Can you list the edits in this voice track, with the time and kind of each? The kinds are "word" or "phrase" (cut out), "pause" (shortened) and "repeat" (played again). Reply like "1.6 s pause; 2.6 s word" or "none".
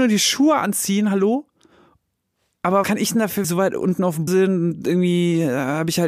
2.8 s word; 3.4 s phrase; 4.3 s word